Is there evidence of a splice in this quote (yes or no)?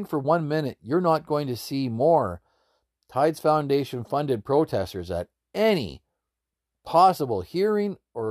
no